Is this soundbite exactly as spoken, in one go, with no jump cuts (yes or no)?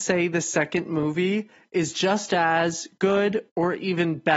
yes